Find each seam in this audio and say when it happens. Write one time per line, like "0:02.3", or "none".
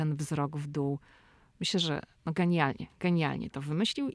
none